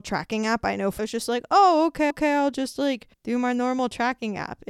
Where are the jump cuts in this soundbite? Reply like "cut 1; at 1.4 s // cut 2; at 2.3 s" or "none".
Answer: cut 1; at 1.0 s // cut 2; at 2.1 s // cut 3; at 3.1 s